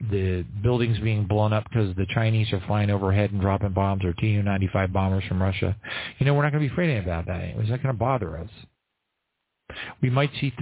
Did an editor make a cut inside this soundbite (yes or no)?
no